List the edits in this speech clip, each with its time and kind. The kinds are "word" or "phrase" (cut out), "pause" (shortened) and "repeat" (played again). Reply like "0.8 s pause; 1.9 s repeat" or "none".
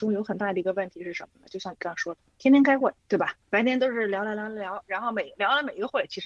3.0 s pause; 3.4 s pause